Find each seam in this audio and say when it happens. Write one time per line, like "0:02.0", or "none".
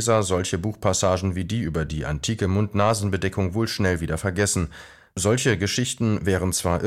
none

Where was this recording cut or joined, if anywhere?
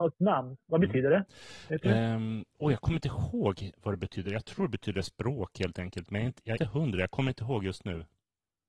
0:06.6

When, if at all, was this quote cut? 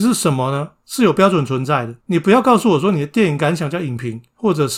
0:02.0

